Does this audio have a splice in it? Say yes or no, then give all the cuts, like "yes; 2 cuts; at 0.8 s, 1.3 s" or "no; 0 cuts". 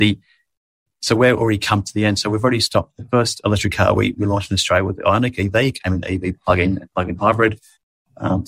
no; 0 cuts